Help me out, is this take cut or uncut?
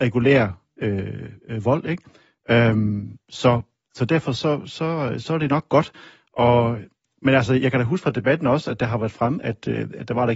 uncut